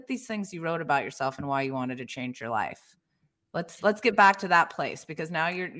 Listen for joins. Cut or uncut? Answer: uncut